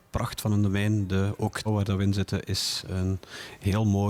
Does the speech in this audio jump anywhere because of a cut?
yes; 1 cut; at 1.7 s

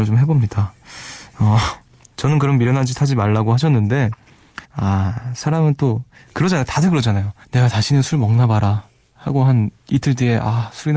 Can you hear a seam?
yes; 2 cuts; at 4.6 s, 7.4 s

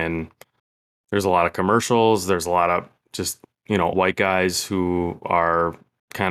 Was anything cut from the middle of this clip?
yes; 1 cut; at 3.9 s

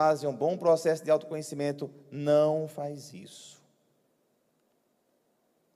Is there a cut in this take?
no; 0 cuts

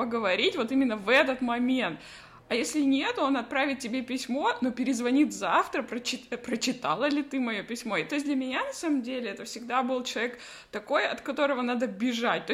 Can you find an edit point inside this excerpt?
no; 0 cuts

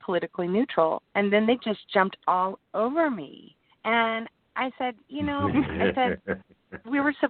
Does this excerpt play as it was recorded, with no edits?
no; 1 cut; at 3.7 s

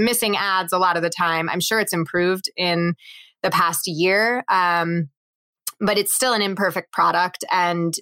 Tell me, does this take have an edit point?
no; 0 cuts

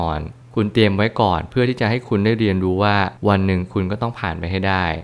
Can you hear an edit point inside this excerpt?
yes; 1 cut; at 3.2 s

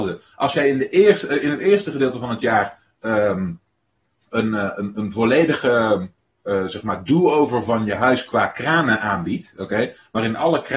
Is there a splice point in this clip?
no; 0 cuts

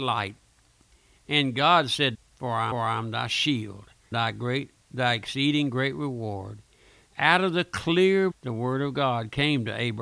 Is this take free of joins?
no; 4 cuts; at 2.1 s, 2.7 s, 4.1 s, 8.3 s

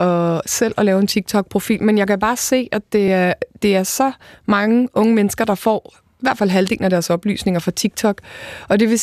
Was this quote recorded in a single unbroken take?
yes; 0 cuts

